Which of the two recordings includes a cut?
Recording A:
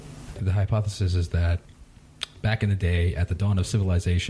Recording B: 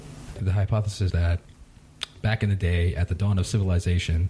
B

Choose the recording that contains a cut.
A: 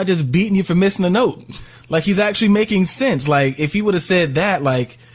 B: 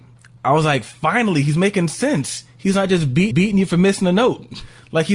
B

